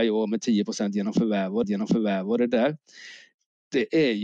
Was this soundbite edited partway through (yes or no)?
yes